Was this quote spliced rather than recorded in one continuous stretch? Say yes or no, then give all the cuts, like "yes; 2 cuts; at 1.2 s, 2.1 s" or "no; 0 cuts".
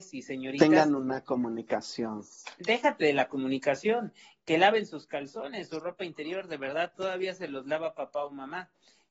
no; 0 cuts